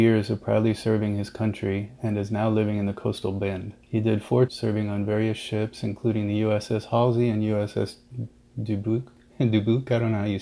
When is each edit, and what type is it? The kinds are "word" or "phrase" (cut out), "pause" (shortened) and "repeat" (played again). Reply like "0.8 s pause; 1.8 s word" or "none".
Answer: 3.8 s pause; 4.5 s phrase